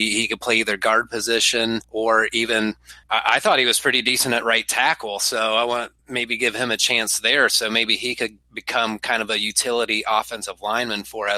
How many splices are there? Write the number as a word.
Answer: three